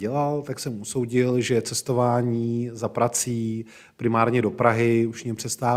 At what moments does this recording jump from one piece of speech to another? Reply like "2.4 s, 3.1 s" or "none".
none